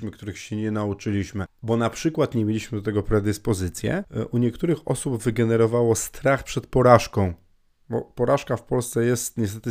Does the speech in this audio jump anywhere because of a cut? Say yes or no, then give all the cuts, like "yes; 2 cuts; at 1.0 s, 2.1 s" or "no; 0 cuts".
no; 0 cuts